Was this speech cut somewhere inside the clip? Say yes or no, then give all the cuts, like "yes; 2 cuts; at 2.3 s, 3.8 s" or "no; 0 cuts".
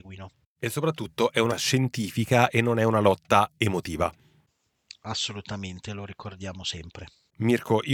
yes; 1 cut; at 1.5 s